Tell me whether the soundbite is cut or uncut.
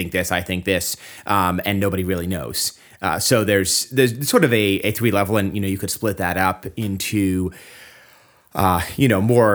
uncut